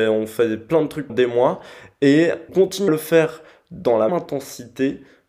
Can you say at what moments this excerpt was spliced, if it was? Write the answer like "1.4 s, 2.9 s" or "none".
1.1 s, 2.5 s, 2.9 s, 4.1 s